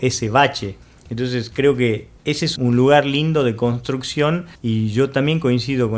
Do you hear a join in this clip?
yes; 3 cuts; at 2.2 s, 2.6 s, 4.6 s

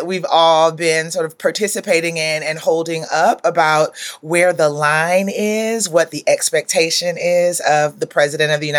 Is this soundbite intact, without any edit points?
yes; 0 cuts

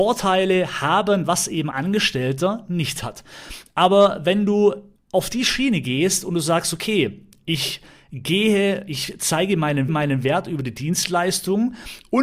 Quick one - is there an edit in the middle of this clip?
yes; 3 cuts; at 1.7 s, 5.0 s, 9.9 s

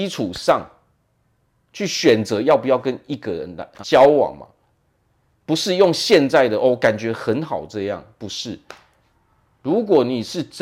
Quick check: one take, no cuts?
no; 1 cut; at 3.8 s

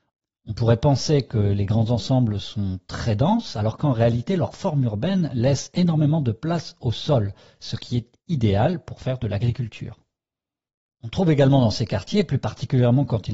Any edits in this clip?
no; 0 cuts

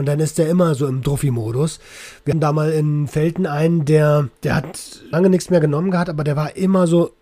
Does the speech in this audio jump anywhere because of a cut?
yes; 3 cuts; at 2.3 s, 4.4 s, 5.1 s

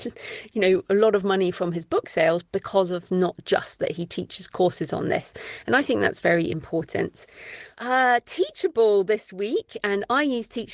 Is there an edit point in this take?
yes; 2 cuts; at 3.0 s, 7.7 s

